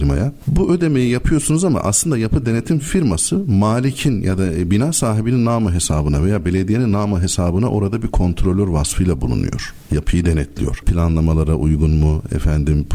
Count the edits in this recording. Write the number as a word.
zero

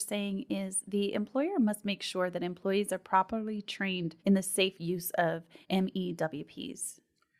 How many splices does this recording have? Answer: two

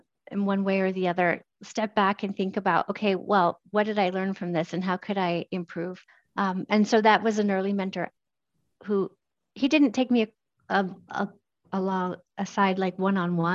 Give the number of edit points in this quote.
one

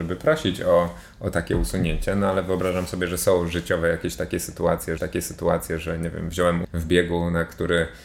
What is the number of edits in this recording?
two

